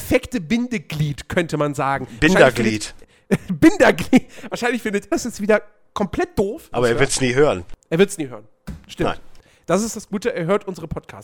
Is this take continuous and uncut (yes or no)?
no